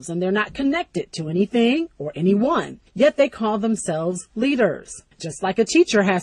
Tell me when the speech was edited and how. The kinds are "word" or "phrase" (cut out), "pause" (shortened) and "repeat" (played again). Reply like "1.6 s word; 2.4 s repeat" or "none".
2.9 s pause; 5.1 s pause